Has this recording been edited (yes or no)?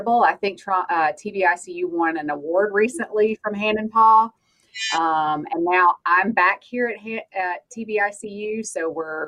no